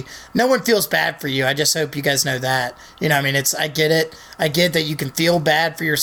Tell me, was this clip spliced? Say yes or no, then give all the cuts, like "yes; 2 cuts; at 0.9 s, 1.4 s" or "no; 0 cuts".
no; 0 cuts